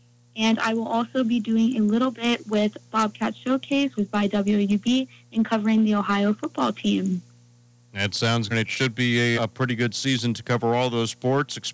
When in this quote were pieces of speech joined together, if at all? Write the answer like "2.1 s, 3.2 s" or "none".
4.0 s, 8.5 s, 9.4 s